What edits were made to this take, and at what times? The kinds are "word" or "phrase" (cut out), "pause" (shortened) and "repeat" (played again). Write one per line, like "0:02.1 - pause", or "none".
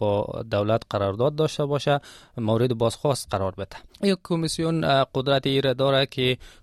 0:03.9 - pause